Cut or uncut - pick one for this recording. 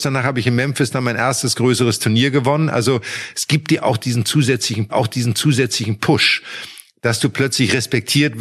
cut